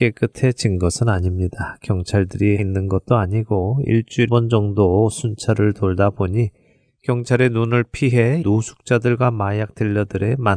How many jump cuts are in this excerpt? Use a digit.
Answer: 3